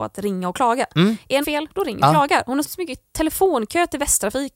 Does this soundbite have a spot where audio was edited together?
yes; 3 cuts; at 1.4 s, 2.0 s, 2.6 s

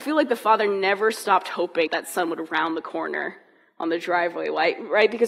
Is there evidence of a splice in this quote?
yes; 1 cut; at 1.9 s

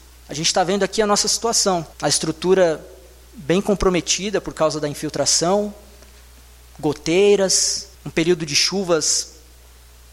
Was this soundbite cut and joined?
yes; 2 cuts; at 1.9 s, 7.9 s

